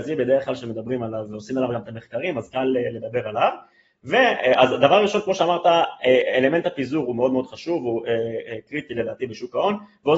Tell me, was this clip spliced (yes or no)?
no